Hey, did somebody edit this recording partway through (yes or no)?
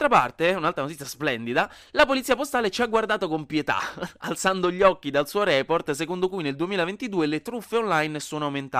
no